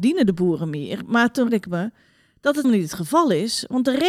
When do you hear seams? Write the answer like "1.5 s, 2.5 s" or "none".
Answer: 1.5 s, 2.6 s